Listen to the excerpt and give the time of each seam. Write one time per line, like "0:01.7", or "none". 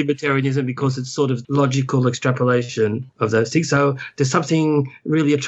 0:01.4
0:03.1